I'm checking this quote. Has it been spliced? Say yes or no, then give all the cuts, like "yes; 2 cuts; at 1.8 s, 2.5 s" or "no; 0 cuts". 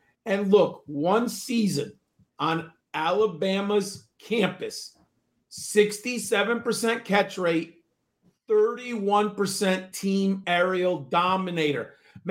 no; 0 cuts